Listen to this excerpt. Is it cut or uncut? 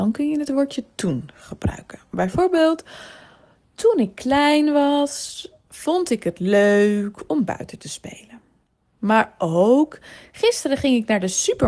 uncut